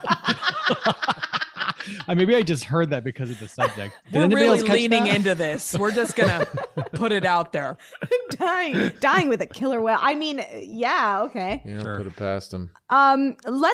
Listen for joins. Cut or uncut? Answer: cut